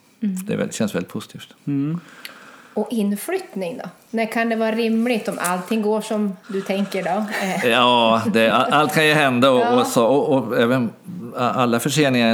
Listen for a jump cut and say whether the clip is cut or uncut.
uncut